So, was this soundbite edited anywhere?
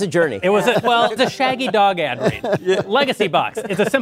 yes; 1 cut; at 1.2 s

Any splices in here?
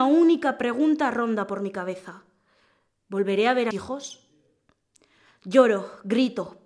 yes; 1 cut; at 3.7 s

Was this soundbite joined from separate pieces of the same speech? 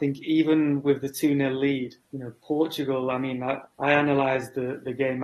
yes; 2 cuts; at 2.0 s, 3.7 s

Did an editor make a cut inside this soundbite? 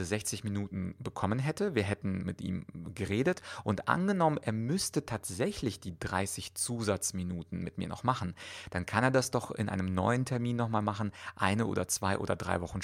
no; 0 cuts

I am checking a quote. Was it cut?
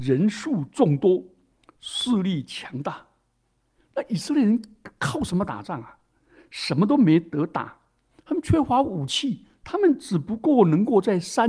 yes; 1 cut; at 9.6 s

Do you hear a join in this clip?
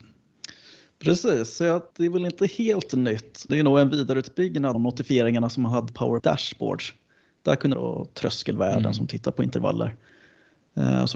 yes; 6 cuts; at 1.9 s, 3.5 s, 4.7 s, 5.9 s, 6.2 s, 7.7 s

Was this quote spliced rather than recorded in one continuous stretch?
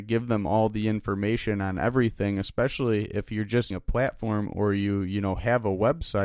yes; 1 cut; at 3.7 s

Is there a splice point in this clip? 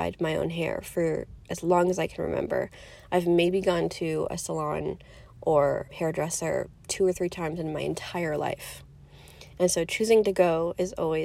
yes; 2 cuts; at 1.4 s, 5.9 s

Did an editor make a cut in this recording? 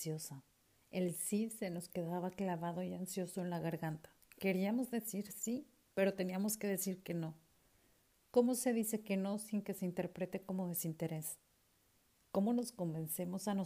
no; 0 cuts

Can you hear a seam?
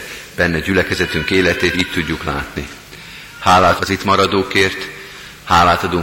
yes; 2 cuts; at 1.7 s, 3.8 s

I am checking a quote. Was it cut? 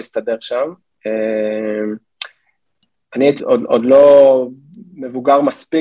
yes; 1 cut; at 3.4 s

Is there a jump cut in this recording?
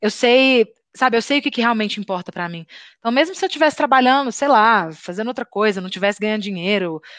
no; 0 cuts

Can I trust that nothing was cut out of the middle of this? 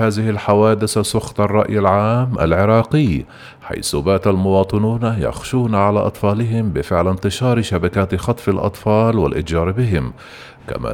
yes; 0 cuts

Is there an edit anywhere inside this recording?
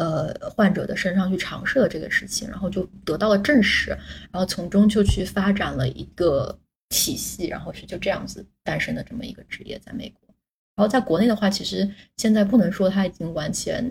no; 0 cuts

